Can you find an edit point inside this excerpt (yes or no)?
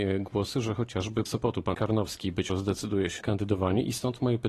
yes